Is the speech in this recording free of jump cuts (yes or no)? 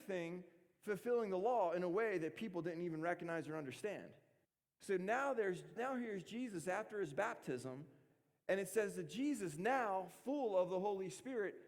no